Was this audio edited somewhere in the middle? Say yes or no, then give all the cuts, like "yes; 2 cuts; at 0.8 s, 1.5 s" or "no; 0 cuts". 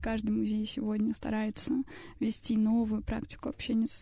no; 0 cuts